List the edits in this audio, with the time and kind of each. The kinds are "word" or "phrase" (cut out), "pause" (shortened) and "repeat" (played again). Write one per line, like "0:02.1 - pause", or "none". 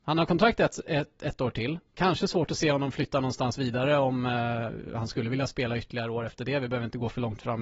0:01.9 - pause